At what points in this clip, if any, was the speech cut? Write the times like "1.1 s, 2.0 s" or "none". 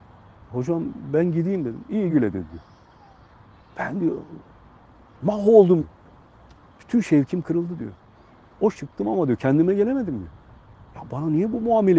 2.1 s, 5.8 s, 8.7 s